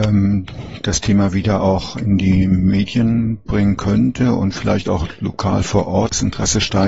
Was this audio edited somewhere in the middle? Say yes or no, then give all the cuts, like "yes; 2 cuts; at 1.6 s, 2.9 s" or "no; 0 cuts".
no; 0 cuts